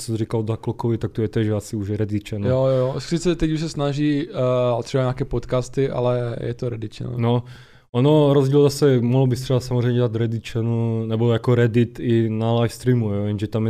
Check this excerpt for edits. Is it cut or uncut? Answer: uncut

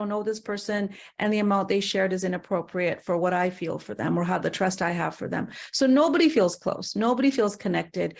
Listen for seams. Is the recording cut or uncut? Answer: uncut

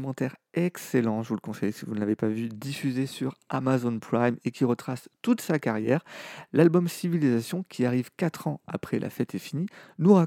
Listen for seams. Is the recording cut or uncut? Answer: uncut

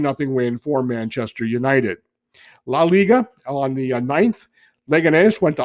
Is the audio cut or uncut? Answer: uncut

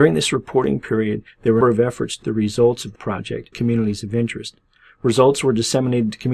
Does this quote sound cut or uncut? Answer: cut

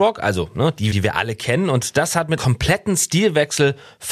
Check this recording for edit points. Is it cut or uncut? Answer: cut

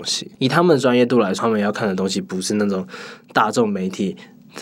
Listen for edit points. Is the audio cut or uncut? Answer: cut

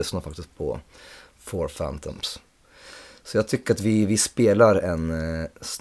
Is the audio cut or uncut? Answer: uncut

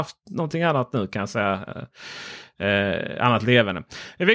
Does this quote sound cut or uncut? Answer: uncut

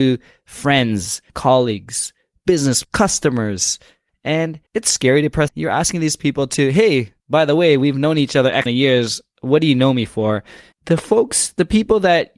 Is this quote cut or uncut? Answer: cut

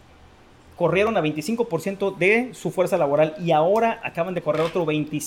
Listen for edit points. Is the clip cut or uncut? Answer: uncut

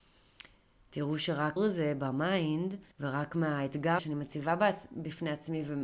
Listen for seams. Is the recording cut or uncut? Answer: cut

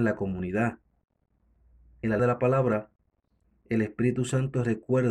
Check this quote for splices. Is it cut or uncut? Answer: cut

